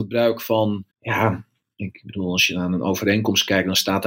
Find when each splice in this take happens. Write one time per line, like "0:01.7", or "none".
0:00.9